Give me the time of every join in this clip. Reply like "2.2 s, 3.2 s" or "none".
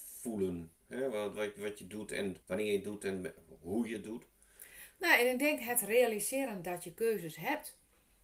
2.4 s